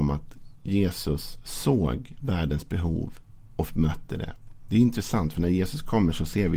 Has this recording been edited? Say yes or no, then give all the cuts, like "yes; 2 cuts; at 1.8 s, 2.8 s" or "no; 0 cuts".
no; 0 cuts